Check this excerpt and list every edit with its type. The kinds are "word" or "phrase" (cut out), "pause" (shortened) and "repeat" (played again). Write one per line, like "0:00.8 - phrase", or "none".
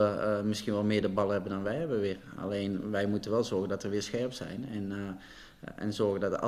none